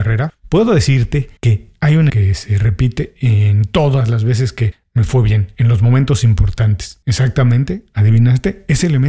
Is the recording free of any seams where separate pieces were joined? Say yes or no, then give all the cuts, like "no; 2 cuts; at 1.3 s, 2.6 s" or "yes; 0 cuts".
no; 2 cuts; at 1.4 s, 2.1 s